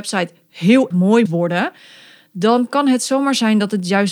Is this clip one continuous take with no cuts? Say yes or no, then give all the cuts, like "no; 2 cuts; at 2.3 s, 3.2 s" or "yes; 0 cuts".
no; 2 cuts; at 0.9 s, 1.3 s